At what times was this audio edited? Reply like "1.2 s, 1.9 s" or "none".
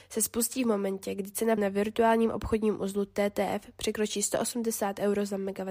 1.6 s